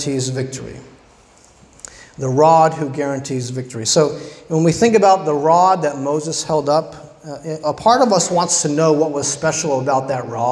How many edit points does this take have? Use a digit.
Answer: 0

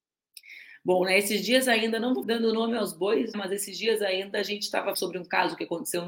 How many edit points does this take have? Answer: 3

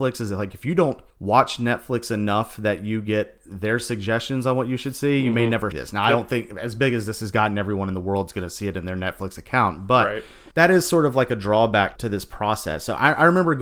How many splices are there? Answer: 4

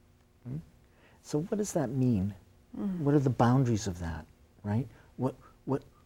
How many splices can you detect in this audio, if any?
0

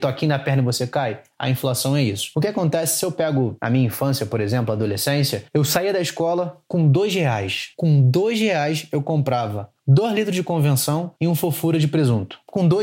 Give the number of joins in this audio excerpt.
2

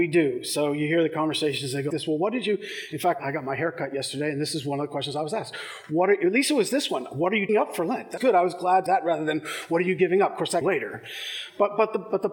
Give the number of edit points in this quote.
6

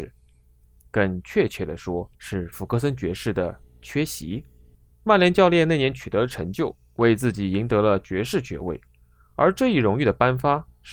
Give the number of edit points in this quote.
2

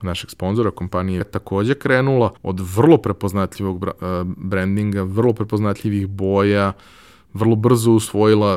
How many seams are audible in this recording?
2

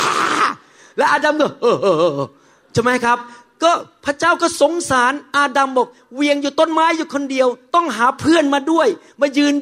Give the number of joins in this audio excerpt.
0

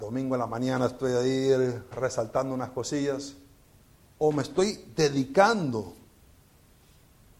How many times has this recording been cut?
1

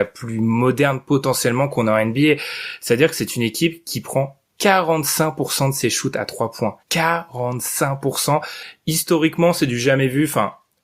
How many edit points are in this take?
1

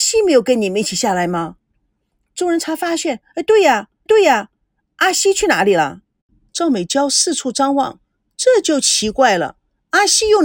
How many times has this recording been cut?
1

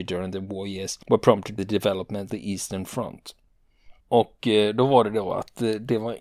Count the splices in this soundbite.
4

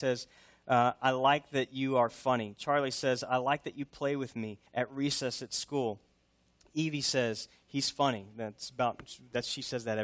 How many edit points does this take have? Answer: 1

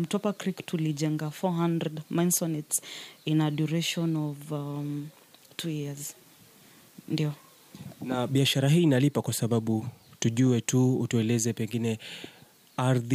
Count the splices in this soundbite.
0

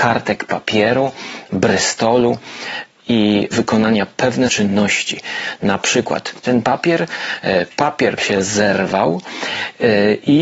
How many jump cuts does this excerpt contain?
5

